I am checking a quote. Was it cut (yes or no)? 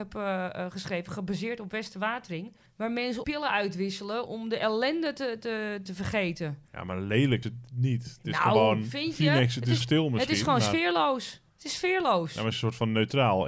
yes